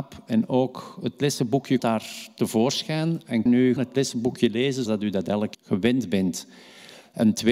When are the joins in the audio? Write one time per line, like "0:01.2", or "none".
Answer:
0:01.8
0:03.5
0:03.8
0:04.9
0:05.5